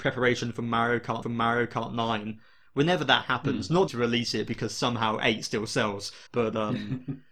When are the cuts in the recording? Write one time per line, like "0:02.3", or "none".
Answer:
0:01.2
0:03.9
0:06.3